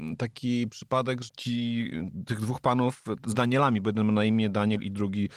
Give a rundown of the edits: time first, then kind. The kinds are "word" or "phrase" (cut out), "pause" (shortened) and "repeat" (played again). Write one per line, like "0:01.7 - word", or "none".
0:01.3 - word
0:03.3 - word